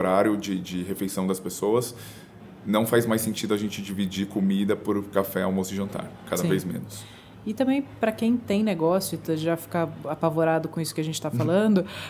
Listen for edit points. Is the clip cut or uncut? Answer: uncut